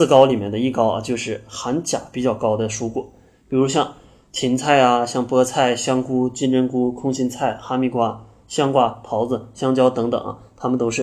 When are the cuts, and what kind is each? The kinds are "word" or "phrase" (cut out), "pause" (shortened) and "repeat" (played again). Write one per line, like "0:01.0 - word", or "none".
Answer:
none